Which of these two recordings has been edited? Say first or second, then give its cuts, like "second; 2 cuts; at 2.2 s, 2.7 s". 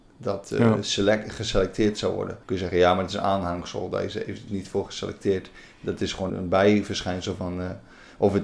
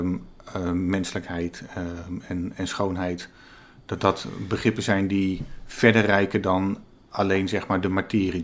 first; 3 cuts; at 2.4 s, 4.5 s, 6.3 s